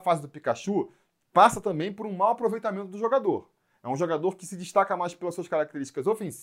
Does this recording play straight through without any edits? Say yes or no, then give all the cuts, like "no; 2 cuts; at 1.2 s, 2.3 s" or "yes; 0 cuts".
yes; 0 cuts